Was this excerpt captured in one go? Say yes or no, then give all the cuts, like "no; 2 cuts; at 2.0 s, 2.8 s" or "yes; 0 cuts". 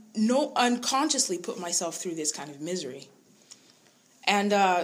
yes; 0 cuts